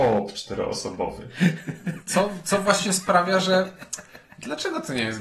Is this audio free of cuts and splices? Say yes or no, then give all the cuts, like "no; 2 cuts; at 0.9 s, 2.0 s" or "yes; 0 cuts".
yes; 0 cuts